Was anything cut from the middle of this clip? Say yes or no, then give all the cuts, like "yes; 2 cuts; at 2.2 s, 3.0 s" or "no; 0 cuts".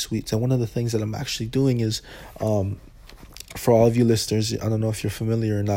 no; 0 cuts